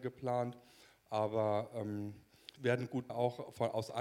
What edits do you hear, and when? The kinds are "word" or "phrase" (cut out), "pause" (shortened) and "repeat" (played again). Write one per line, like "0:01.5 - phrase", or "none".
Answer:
0:02.6 - word
0:03.1 - word